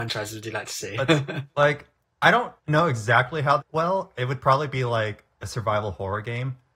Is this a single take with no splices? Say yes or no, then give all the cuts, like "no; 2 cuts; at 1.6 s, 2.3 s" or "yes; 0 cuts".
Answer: no; 2 cuts; at 2.6 s, 3.6 s